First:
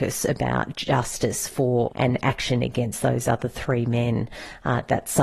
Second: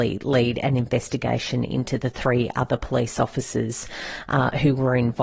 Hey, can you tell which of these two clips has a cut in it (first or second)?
first